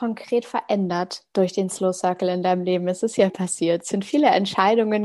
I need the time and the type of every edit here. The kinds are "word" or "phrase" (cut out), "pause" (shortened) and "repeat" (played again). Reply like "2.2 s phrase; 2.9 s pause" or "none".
3.3 s word